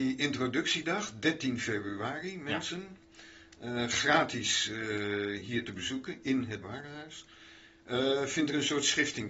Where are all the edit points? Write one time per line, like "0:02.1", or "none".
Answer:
0:06.6